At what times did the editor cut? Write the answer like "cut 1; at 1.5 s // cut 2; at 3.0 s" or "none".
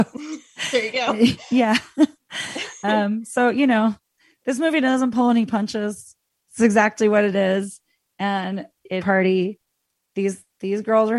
cut 1; at 9.0 s